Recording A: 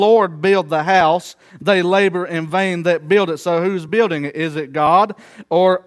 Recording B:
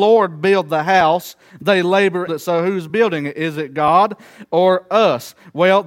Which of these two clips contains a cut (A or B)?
B